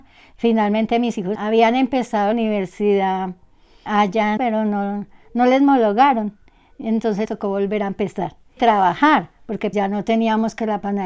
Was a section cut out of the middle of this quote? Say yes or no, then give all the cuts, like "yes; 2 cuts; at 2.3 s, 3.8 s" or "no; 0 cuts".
yes; 7 cuts; at 1.3 s, 2.3 s, 3.9 s, 4.4 s, 7.2 s, 8.6 s, 9.7 s